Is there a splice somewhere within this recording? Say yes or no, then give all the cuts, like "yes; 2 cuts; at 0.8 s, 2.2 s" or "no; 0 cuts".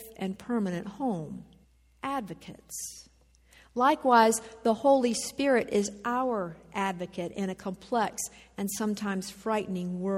yes; 1 cut; at 1.6 s